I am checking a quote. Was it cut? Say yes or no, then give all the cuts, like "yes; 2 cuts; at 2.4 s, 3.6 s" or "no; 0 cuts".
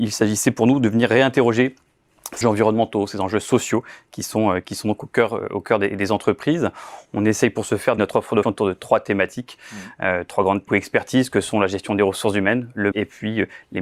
yes; 5 cuts; at 2.4 s, 8.0 s, 8.4 s, 10.7 s, 12.9 s